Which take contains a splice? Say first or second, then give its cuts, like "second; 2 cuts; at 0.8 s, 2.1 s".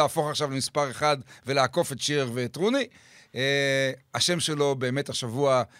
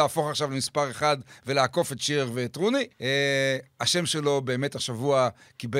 second; 1 cut; at 2.9 s